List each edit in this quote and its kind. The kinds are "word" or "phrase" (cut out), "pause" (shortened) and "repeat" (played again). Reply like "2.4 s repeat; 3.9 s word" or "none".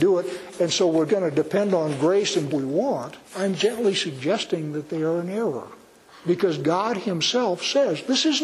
1.1 s word; 2.5 s phrase; 3.2 s pause; 6.0 s pause